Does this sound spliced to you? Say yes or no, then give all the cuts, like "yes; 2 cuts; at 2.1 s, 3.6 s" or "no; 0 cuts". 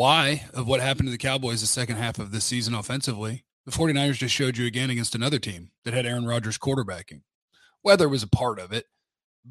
no; 0 cuts